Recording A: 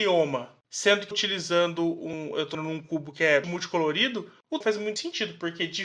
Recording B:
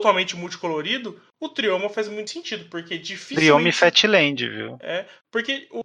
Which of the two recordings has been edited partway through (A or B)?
A